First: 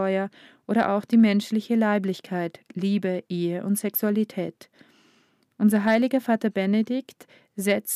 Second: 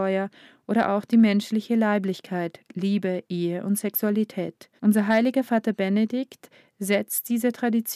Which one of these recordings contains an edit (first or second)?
second